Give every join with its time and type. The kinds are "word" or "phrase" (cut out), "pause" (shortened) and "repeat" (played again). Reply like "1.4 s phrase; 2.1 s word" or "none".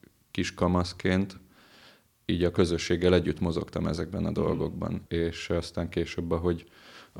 none